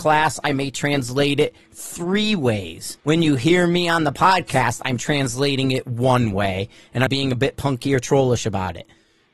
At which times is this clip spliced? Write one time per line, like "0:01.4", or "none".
0:03.0
0:07.1